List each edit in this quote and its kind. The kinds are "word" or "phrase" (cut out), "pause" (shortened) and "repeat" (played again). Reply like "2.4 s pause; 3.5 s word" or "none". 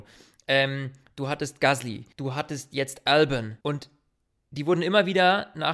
2.1 s pause; 3.6 s pause